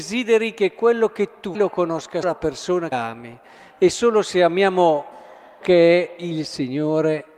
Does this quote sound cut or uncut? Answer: cut